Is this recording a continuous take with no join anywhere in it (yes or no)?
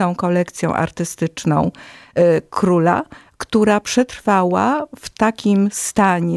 yes